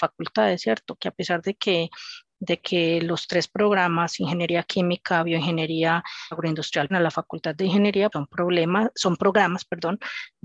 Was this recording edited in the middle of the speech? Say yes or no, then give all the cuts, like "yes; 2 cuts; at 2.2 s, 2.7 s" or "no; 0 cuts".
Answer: yes; 3 cuts; at 6.3 s, 6.9 s, 8.1 s